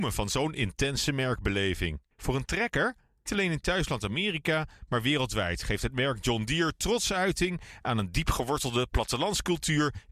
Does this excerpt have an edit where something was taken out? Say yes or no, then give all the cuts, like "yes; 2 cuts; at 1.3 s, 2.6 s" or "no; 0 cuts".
yes; 2 cuts; at 2.1 s, 3.3 s